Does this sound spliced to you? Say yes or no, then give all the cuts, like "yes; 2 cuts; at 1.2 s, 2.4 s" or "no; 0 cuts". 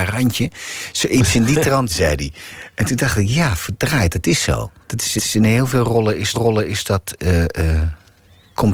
yes; 4 cuts; at 1.9 s, 4.8 s, 5.2 s, 6.3 s